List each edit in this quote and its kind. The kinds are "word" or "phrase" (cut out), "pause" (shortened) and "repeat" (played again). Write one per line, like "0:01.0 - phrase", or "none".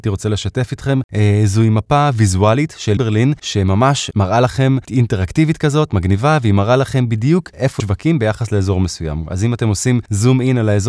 0:03.0 - word
0:07.8 - word